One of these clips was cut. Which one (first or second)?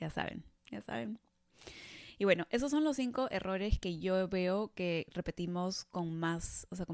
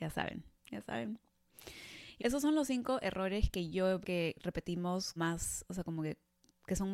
second